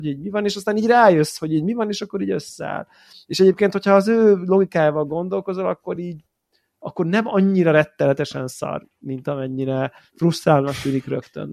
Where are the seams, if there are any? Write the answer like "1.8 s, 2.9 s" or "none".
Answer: none